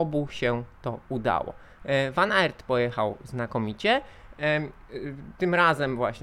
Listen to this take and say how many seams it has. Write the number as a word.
zero